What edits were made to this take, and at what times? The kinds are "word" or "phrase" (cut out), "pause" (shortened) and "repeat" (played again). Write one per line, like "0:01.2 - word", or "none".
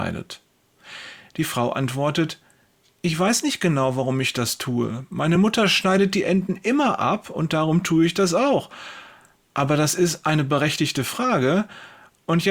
none